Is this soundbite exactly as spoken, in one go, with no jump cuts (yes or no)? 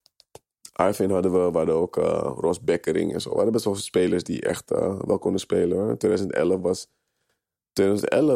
yes